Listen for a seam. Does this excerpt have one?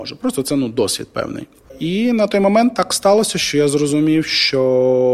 no; 0 cuts

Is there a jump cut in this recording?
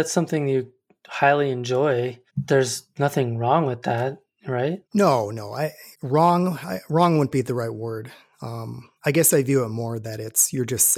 yes; 4 cuts; at 2.3 s, 4.8 s, 5.9 s, 9.0 s

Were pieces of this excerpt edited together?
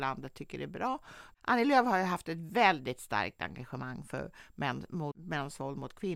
no; 0 cuts

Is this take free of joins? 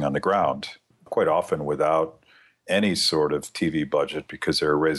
yes; 0 cuts

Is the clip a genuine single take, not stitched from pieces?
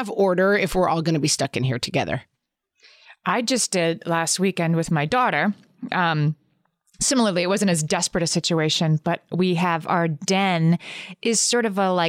yes; 0 cuts

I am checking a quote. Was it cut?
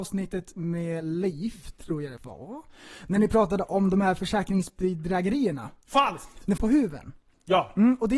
yes; 2 cuts; at 2.2 s, 6.6 s

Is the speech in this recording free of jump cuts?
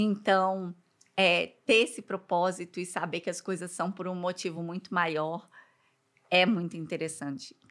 yes; 0 cuts

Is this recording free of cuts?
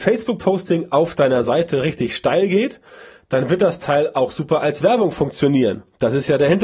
yes; 0 cuts

